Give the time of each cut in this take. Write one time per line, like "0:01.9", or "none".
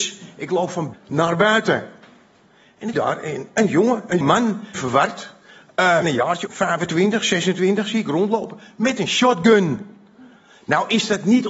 0:00.9
0:02.9
0:04.2
0:04.7
0:06.0
0:06.5